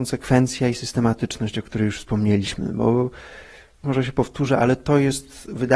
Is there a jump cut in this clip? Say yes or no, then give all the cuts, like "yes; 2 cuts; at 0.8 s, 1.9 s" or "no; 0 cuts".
no; 0 cuts